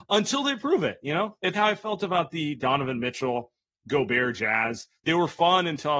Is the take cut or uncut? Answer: cut